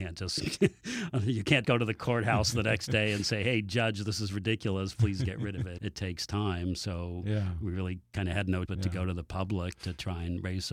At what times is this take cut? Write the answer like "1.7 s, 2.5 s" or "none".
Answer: 1.6 s, 5.8 s, 8.7 s